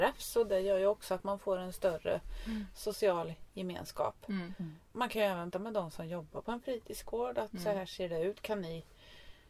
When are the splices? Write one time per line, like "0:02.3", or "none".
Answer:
0:05.5